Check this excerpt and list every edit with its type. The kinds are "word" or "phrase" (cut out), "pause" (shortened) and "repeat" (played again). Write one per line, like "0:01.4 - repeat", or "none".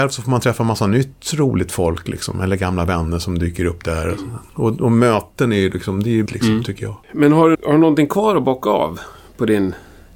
0:04.5 - pause
0:06.3 - phrase
0:07.0 - pause
0:07.5 - word